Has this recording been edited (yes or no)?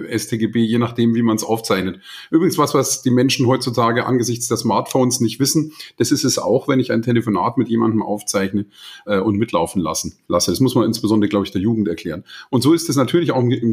yes